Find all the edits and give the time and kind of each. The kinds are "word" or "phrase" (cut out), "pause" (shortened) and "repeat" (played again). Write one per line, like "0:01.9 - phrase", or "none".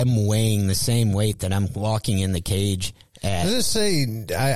none